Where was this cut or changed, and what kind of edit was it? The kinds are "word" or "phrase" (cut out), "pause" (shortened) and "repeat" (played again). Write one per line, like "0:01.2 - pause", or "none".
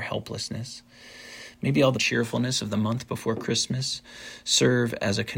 0:01.9 - phrase